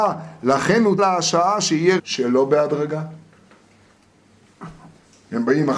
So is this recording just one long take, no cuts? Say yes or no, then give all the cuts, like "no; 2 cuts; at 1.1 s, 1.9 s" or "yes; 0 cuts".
no; 2 cuts; at 1.0 s, 2.0 s